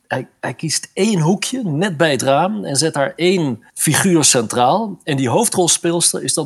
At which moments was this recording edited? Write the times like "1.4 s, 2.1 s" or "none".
3.7 s